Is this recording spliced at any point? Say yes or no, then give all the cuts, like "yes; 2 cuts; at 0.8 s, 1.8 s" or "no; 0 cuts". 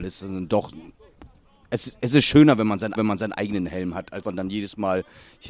yes; 2 cuts; at 3.0 s, 4.2 s